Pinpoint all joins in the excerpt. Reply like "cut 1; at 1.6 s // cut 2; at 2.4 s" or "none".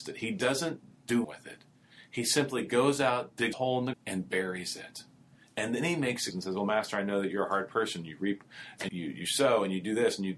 cut 1; at 1.2 s // cut 2; at 3.5 s // cut 3; at 3.9 s // cut 4; at 6.3 s // cut 5; at 8.9 s